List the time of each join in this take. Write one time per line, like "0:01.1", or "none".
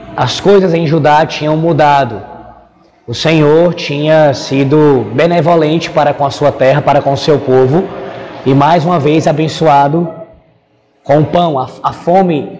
none